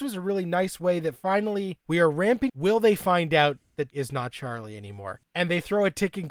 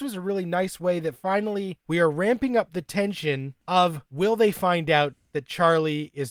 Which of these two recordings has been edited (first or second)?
first